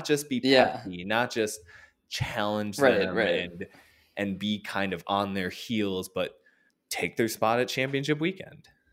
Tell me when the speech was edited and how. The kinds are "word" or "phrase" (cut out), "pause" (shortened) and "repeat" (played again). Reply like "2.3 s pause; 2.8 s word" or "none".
6.7 s pause